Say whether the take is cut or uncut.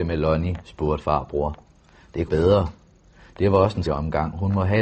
cut